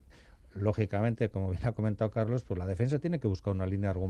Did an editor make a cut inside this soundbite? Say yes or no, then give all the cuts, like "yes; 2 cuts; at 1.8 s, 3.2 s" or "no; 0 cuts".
no; 0 cuts